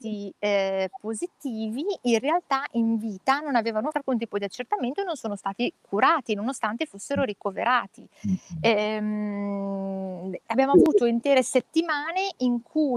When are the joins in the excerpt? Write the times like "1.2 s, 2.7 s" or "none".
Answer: 3.9 s, 8.2 s